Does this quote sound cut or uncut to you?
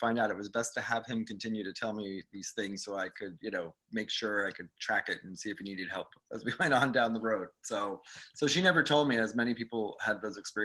uncut